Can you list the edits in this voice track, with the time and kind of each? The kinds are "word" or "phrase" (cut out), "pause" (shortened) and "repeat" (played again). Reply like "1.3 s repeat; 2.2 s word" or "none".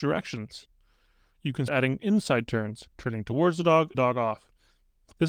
1.7 s word; 2.9 s pause; 3.9 s phrase